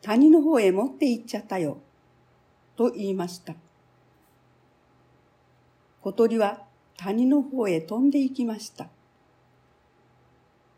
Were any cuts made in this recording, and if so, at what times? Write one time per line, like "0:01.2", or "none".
none